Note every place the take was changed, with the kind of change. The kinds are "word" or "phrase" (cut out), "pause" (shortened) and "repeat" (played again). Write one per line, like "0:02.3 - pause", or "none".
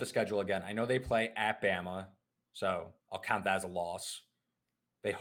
0:03.0 - pause